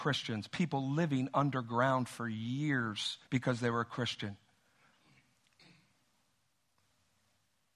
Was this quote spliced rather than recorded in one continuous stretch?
yes; 1 cut; at 3.2 s

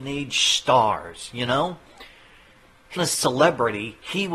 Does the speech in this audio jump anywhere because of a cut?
yes; 1 cut; at 3.0 s

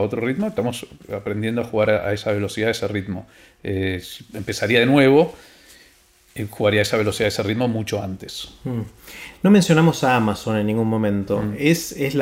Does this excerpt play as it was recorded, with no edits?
yes; 0 cuts

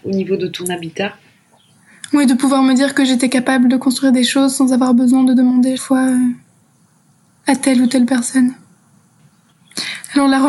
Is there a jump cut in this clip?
yes; 1 cut; at 5.8 s

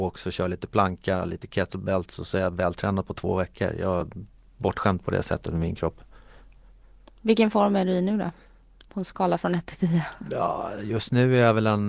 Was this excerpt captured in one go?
yes; 0 cuts

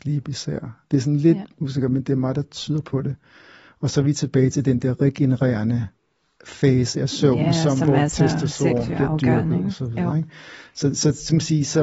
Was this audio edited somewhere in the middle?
no; 0 cuts

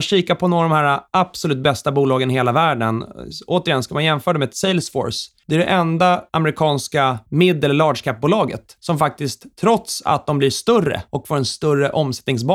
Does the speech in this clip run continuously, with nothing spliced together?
yes; 0 cuts

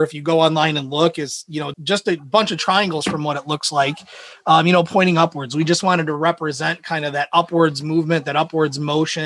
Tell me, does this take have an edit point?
yes; 1 cut; at 1.7 s

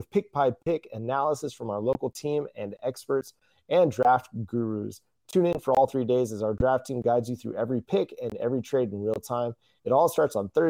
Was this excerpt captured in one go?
yes; 0 cuts

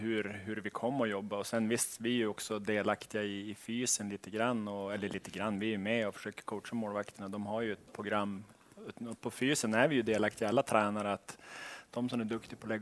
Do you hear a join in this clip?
yes; 1 cut; at 7.9 s

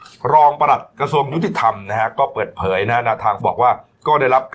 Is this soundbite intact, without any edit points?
no; 1 cut; at 3.4 s

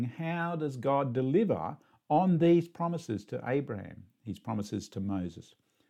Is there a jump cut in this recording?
no; 0 cuts

